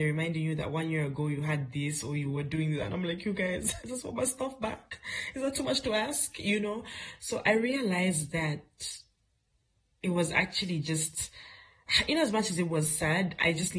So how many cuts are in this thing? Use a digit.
1